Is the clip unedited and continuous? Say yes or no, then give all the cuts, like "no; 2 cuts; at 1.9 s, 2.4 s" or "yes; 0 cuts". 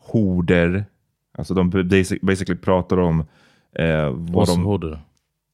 yes; 0 cuts